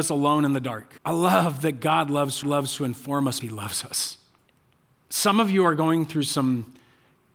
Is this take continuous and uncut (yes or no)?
no